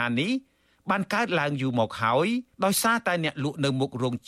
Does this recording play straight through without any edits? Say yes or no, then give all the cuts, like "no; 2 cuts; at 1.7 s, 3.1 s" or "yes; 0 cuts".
no; 1 cut; at 2.5 s